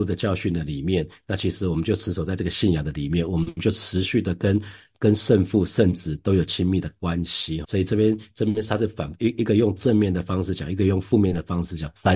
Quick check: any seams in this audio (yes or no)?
yes